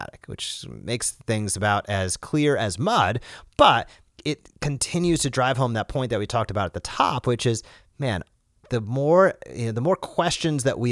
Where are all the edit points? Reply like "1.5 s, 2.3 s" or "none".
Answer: none